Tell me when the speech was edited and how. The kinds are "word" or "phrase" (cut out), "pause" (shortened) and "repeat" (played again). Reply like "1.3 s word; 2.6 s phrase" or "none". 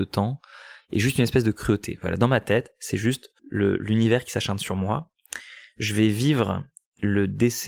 3.4 s pause